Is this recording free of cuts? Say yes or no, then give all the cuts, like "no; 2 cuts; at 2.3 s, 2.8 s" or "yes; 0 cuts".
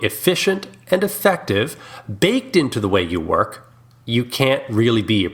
yes; 0 cuts